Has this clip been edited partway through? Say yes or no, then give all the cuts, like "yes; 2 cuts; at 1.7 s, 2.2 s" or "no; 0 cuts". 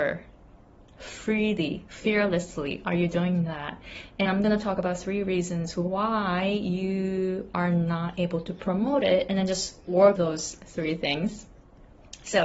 yes; 2 cuts; at 4.3 s, 10.2 s